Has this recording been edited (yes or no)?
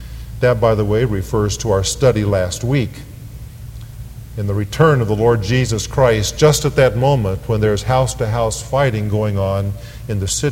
no